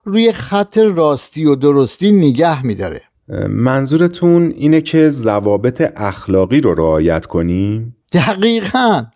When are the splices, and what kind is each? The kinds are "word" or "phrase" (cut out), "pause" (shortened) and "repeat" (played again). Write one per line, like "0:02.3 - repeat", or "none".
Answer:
0:08.0 - pause